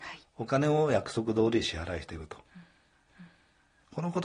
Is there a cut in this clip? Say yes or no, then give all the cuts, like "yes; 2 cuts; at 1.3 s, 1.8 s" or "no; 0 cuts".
yes; 1 cut; at 3.1 s